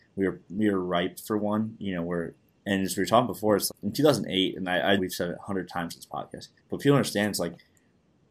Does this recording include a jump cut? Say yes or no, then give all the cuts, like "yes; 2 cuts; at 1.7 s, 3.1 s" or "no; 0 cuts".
yes; 4 cuts; at 2.5 s, 3.7 s, 5.0 s, 6.6 s